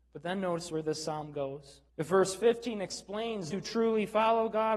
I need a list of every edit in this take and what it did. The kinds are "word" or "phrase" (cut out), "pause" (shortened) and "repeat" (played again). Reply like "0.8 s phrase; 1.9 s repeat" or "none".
1.9 s pause; 3.5 s word